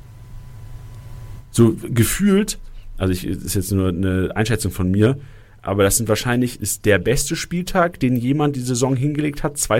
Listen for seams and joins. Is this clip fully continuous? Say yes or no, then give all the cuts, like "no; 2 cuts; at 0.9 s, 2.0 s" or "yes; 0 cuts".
yes; 0 cuts